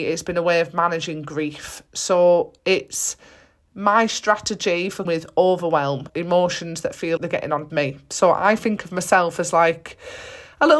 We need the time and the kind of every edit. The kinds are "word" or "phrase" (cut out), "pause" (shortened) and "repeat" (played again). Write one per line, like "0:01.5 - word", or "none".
0:02.6 - pause
0:05.1 - word
0:06.1 - word
0:07.2 - word
0:07.7 - phrase